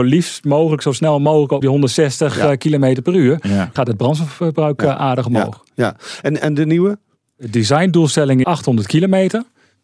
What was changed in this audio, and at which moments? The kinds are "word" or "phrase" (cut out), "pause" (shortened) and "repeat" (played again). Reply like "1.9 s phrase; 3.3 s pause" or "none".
1.6 s word; 3.8 s word; 8.4 s word